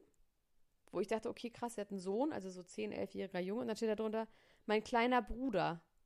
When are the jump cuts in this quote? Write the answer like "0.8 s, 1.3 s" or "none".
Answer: none